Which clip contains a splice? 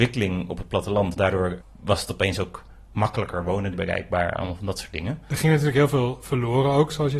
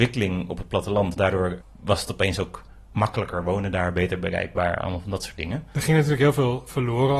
first; 1 cut; at 3.7 s

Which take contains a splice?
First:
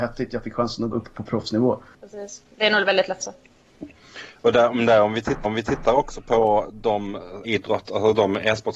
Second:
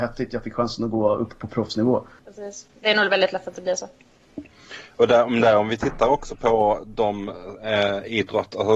first; 4 cuts; at 0.9 s, 3.2 s, 5.4 s, 7.4 s

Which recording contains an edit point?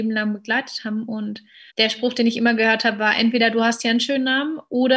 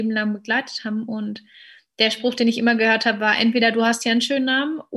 first; 1 cut; at 1.7 s

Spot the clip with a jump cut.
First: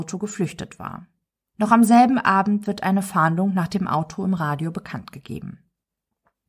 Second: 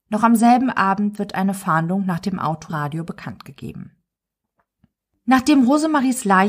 second; 1 cut; at 2.7 s

